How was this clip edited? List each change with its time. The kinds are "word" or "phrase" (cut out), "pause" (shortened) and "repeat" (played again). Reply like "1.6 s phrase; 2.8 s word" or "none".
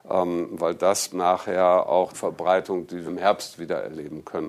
1.1 s word; 2.1 s word; 3.1 s word